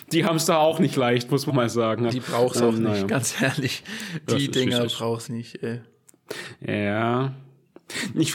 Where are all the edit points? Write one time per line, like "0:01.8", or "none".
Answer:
0:01.5
0:02.1
0:05.3

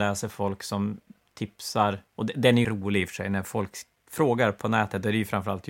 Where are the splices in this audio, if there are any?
0:02.1
0:02.6

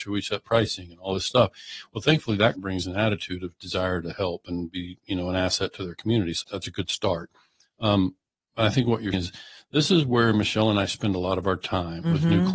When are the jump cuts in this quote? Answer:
0:02.5
0:06.4
0:09.1

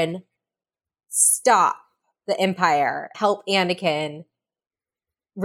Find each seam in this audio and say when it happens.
0:03.1

